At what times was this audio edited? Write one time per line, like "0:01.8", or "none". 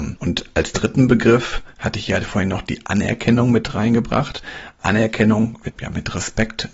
0:05.7

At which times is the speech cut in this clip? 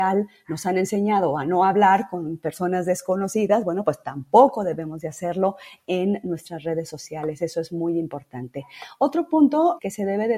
none

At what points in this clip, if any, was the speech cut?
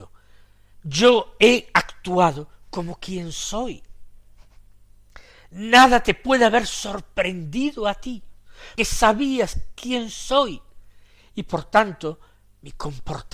0:08.8

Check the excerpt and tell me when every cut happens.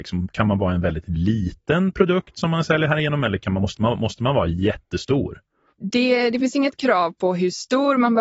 none

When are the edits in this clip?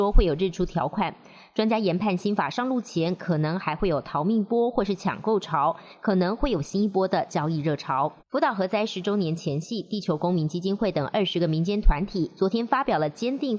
0:08.2

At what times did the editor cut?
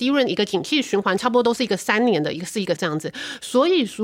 0:02.8

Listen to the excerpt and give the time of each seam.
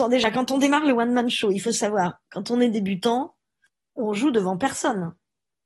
none

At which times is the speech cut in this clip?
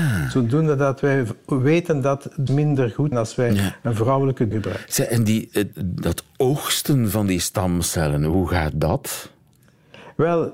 0:02.5
0:03.1
0:04.5

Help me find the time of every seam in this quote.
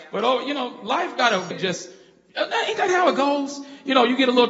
0:01.5

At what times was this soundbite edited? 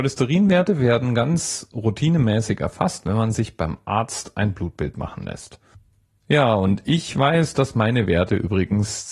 none

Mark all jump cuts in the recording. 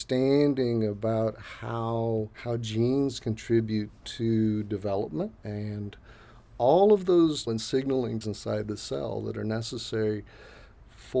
0:02.3
0:05.4
0:07.5
0:08.2

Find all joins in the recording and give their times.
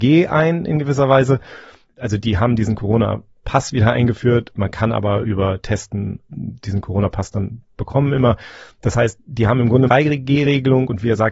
0:04.5
0:09.9

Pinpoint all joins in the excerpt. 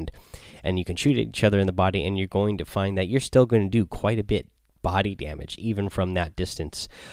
none

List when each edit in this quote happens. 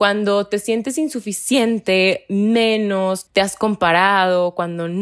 0:03.3

